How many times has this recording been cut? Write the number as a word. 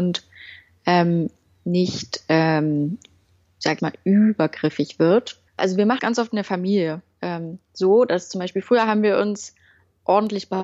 three